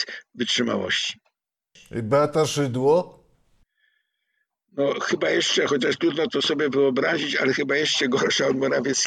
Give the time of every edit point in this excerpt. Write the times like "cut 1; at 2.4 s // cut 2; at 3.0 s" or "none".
none